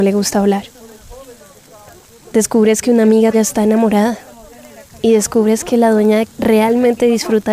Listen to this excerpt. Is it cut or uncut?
cut